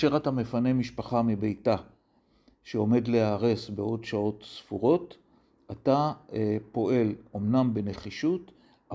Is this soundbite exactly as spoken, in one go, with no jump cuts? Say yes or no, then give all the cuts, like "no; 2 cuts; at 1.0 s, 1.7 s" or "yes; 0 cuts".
yes; 0 cuts